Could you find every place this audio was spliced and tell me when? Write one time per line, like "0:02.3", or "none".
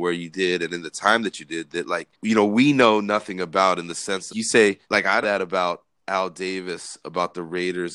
0:02.1
0:04.3
0:04.8
0:05.2

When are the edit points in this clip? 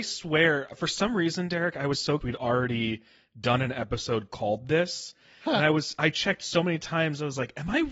0:02.2

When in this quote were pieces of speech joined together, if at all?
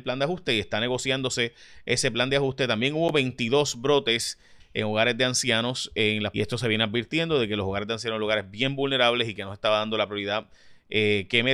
0:06.3

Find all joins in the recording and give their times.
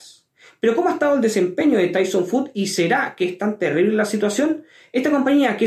none

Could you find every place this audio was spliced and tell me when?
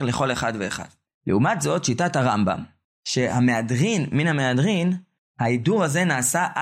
none

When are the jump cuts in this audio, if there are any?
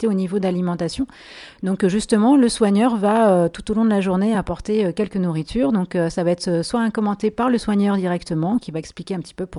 none

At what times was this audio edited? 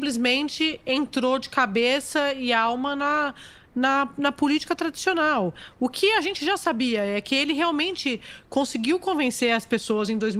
none

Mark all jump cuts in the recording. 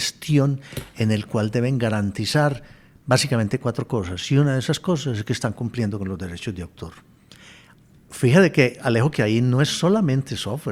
none

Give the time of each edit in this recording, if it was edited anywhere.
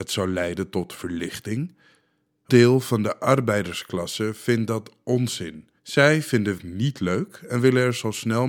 0:02.5
0:05.8
0:06.6

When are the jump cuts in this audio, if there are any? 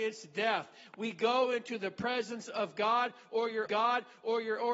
0:03.7

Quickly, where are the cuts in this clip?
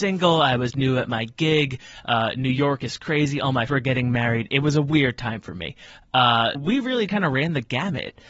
0:03.7
0:06.5
0:07.1

